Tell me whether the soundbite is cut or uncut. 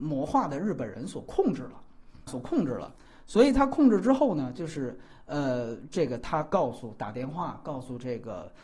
cut